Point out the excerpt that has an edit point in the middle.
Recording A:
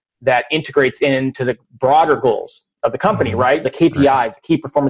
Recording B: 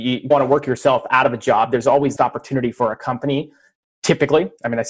B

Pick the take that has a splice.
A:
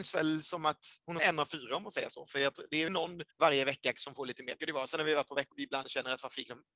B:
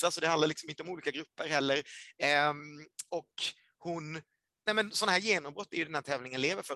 A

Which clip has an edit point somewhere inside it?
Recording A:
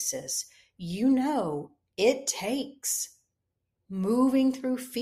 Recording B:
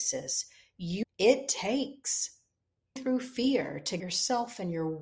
B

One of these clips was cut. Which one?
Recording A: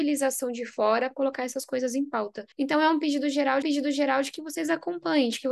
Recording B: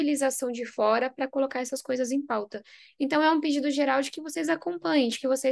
A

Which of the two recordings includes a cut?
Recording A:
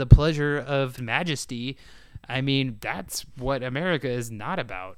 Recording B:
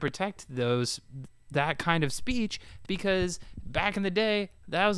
A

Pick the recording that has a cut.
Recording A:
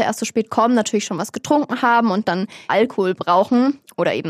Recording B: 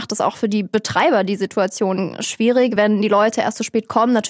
A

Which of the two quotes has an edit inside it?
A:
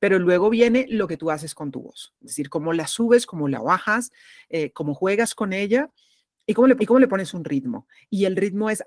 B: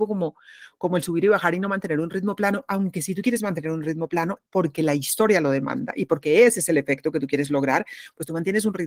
A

